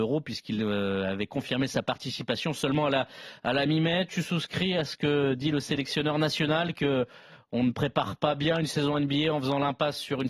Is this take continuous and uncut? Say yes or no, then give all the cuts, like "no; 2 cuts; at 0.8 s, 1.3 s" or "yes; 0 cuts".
yes; 0 cuts